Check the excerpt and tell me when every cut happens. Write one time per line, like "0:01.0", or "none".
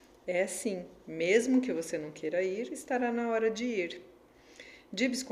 none